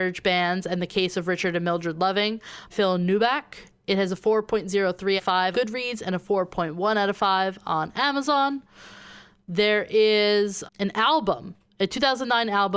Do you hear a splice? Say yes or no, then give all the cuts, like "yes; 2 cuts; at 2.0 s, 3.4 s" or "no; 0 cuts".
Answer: yes; 4 cuts; at 2.7 s, 5.2 s, 5.5 s, 10.7 s